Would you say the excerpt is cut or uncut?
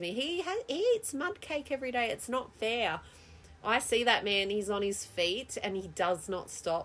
uncut